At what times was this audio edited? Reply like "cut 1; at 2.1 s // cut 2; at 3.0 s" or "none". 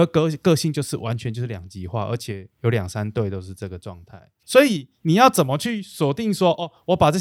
cut 1; at 4.4 s